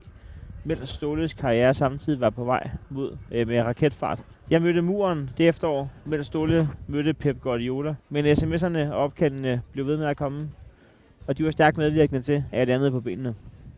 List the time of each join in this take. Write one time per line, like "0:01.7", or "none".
0:04.3
0:08.0